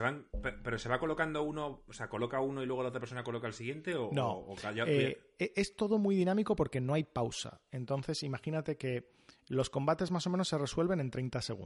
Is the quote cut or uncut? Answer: uncut